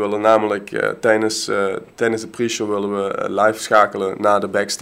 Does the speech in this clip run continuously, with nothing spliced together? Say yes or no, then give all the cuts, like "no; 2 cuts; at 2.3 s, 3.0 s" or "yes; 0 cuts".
yes; 0 cuts